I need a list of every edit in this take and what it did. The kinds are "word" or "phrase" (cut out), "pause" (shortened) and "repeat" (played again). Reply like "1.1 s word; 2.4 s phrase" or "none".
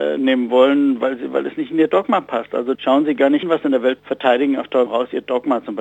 2.7 s word; 3.4 s word; 4.0 s phrase; 4.9 s word